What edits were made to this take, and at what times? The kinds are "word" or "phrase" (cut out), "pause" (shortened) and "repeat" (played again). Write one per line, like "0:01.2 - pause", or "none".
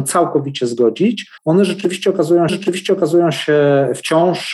0:01.4 - pause
0:02.5 - repeat